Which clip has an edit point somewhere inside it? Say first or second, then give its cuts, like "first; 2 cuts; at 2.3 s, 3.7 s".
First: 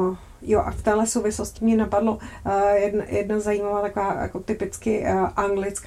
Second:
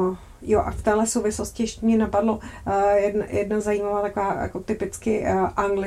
first; 1 cut; at 1.6 s